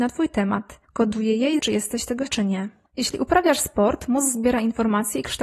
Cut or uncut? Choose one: cut